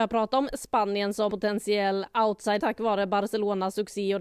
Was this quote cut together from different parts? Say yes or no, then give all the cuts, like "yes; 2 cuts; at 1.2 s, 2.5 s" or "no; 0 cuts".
yes; 2 cuts; at 1.3 s, 2.6 s